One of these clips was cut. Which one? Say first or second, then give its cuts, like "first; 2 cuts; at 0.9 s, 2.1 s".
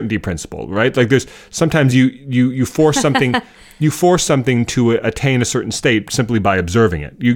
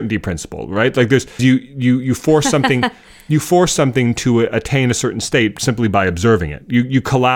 second; 1 cut; at 1.4 s